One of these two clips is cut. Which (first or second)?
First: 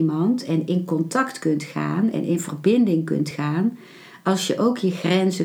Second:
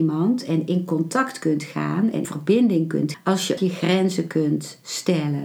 second